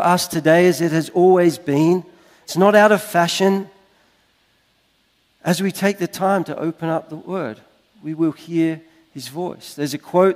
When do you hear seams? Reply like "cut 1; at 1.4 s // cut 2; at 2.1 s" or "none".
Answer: none